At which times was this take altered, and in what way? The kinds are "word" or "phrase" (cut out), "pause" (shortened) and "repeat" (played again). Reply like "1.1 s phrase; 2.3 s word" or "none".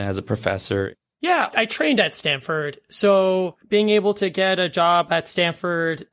1.5 s word